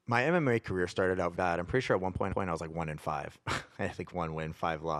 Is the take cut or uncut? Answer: cut